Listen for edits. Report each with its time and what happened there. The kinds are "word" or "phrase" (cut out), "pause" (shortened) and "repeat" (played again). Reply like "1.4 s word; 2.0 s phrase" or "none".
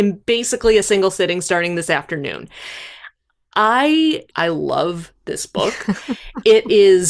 4.3 s phrase